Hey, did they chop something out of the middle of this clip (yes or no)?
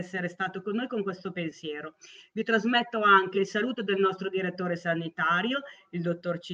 no